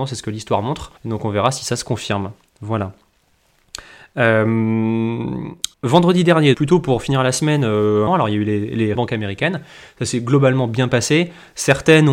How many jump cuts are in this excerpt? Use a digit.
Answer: 5